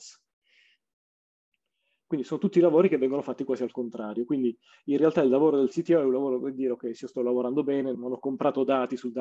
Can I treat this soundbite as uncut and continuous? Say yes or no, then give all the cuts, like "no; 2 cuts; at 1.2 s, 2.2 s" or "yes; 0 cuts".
no; 1 cut; at 7.9 s